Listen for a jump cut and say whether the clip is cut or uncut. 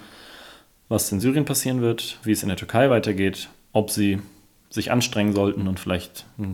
uncut